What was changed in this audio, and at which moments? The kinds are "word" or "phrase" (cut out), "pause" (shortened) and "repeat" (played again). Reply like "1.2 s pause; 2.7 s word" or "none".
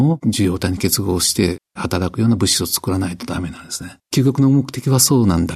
4.0 s pause